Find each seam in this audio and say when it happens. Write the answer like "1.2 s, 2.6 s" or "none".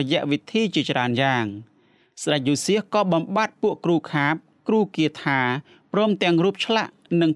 none